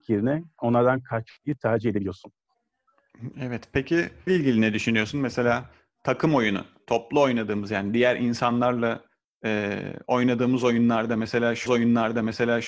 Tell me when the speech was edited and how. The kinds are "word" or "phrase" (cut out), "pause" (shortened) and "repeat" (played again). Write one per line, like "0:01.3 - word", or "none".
0:04.3 - word
0:11.7 - repeat